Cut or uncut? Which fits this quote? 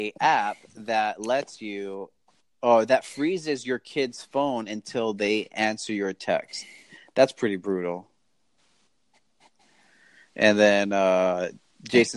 uncut